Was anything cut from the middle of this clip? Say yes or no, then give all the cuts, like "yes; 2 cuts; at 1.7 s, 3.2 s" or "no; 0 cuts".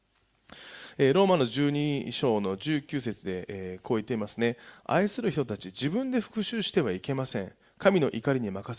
no; 0 cuts